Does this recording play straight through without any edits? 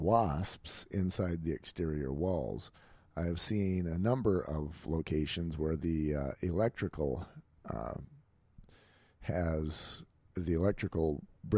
yes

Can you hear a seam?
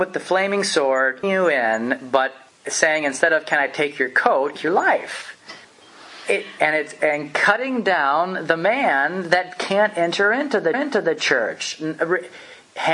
yes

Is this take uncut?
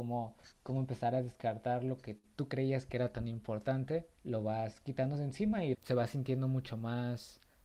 no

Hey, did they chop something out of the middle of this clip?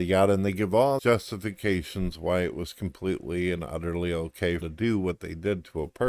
yes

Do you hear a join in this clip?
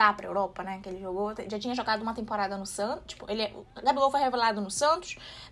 no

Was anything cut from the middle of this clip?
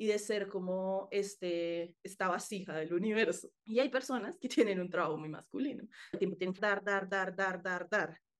yes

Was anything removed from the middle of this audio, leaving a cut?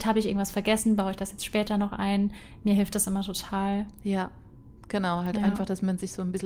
no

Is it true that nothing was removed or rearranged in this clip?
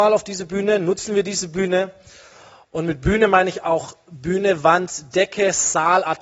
yes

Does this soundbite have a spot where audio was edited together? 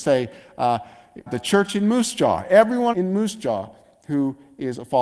yes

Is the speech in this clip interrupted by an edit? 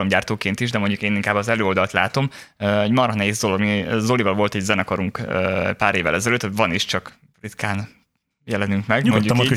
no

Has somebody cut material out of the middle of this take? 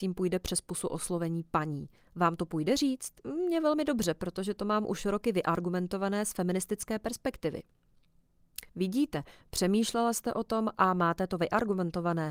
yes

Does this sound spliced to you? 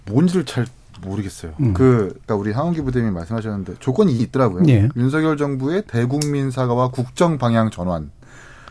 yes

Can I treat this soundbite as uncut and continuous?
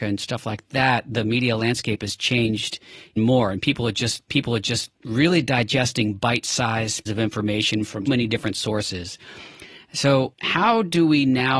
no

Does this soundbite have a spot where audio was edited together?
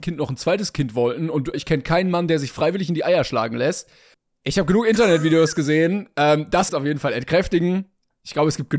yes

